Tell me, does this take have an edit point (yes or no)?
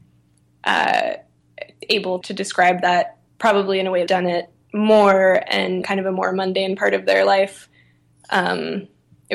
yes